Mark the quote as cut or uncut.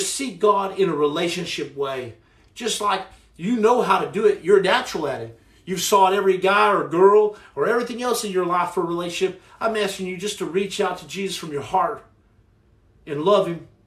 uncut